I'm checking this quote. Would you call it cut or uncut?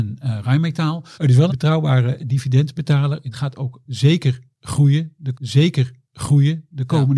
cut